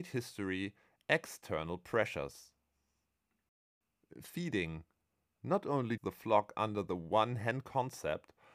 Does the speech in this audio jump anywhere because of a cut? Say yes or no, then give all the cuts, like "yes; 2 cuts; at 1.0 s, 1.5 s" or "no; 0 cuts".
yes; 1 cut; at 6.0 s